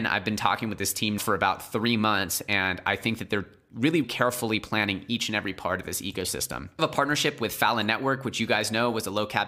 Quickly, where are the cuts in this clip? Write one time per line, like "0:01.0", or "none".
0:01.2
0:04.0
0:06.8